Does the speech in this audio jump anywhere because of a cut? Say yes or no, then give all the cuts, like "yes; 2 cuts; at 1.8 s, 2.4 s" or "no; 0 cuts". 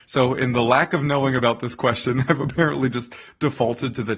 no; 0 cuts